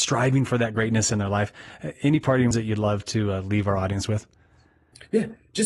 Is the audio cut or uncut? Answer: cut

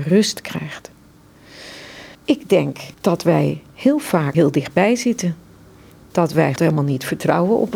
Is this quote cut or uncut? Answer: cut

